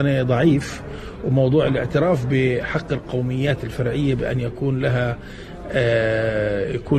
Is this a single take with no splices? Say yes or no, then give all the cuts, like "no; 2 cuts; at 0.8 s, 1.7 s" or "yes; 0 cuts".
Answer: yes; 0 cuts